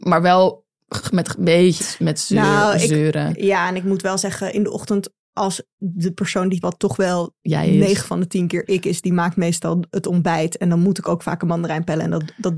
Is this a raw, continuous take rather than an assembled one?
no; 2 cuts; at 1.8 s, 6.6 s

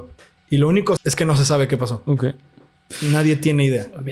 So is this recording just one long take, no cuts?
no; 1 cut; at 1.0 s

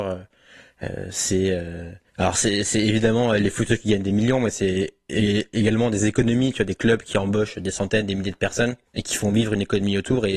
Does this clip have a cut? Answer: yes; 2 cuts; at 2.1 s, 8.9 s

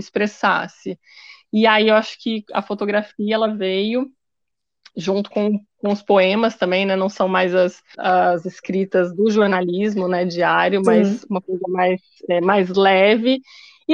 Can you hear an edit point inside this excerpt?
yes; 2 cuts; at 5.3 s, 7.9 s

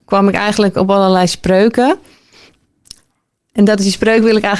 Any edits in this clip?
no; 0 cuts

